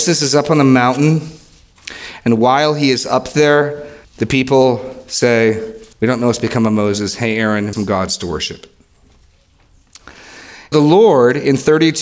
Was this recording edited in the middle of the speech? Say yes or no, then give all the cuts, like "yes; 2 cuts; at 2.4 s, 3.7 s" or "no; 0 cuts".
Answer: yes; 4 cuts; at 4.0 s, 5.9 s, 7.7 s, 10.7 s